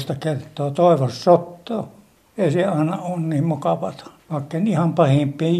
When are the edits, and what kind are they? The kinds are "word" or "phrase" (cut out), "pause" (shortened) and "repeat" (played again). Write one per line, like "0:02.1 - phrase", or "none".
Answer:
0:04.2 - pause